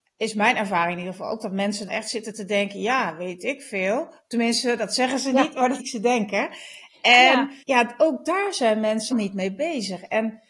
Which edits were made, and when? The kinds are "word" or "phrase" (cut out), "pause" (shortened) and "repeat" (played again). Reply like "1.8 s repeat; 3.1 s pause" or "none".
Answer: 1.9 s word; 5.8 s word; 7.6 s pause; 9.1 s word